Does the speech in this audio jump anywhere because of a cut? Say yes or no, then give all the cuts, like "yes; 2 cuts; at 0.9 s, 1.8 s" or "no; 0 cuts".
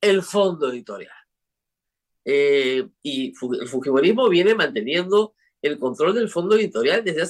no; 0 cuts